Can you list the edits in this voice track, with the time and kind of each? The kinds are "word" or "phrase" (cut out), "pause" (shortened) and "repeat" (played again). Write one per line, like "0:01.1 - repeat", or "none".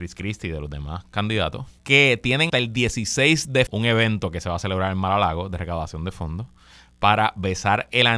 0:01.8 - pause
0:02.5 - word
0:03.7 - word

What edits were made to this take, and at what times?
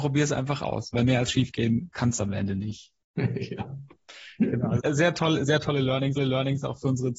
0:04.8 - word
0:06.2 - repeat

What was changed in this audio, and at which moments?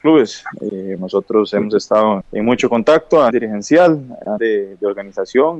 0:01.0 - word
0:02.2 - word
0:03.3 - word
0:04.4 - word

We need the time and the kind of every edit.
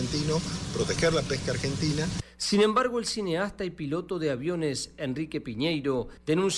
none

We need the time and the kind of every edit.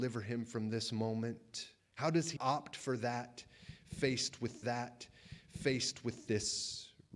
0:01.8 - pause
0:02.4 - word
0:04.6 - repeat

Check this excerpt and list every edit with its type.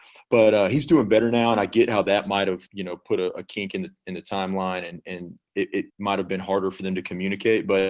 0:02.7 - pause
0:05.9 - pause

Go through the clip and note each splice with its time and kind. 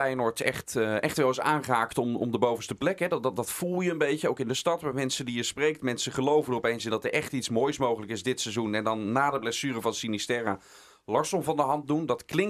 none

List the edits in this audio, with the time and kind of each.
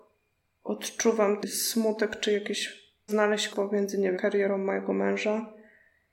0:01.4 - word
0:03.1 - word
0:03.5 - word
0:04.1 - word

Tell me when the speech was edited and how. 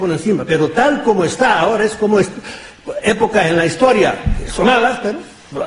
0:04.6 - word

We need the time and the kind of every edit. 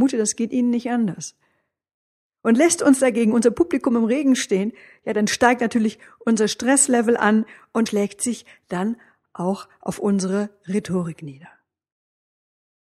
0:07.9 - word

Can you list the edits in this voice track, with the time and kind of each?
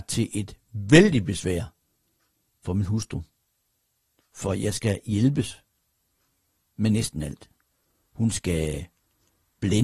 none

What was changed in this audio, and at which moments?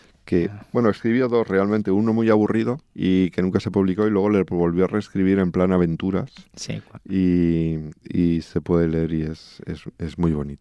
0:02.9 - pause

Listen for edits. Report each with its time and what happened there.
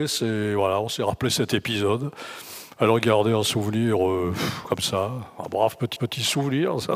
0:06.0 - repeat

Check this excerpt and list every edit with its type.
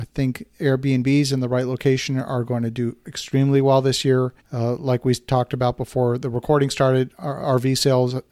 0:04.4 - pause

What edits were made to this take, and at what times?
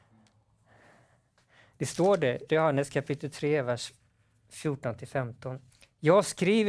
0:02.5 - word
0:05.7 - pause

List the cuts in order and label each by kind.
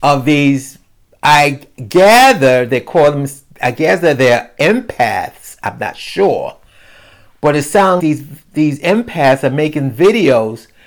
0:08.0 - word

